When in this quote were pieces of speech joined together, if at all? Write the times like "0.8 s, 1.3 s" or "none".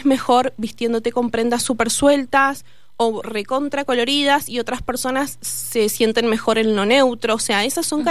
none